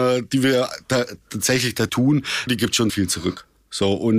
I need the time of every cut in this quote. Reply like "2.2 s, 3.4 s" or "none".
1.9 s, 2.5 s, 2.9 s

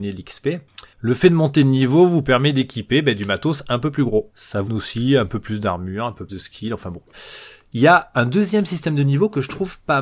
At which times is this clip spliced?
4.7 s, 6.3 s

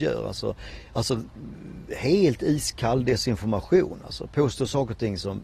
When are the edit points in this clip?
none

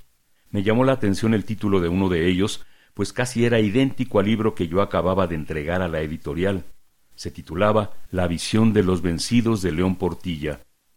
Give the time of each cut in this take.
none

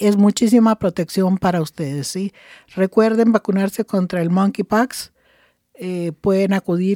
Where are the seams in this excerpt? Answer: none

